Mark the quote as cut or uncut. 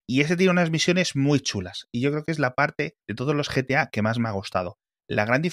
cut